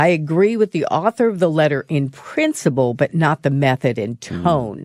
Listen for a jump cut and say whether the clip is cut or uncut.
uncut